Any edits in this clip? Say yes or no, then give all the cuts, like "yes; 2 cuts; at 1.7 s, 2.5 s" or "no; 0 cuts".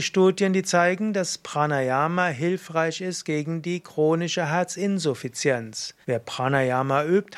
yes; 1 cut; at 6.0 s